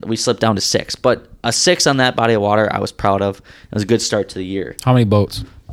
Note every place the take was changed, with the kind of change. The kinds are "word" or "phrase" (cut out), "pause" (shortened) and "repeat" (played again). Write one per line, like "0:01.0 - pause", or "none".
none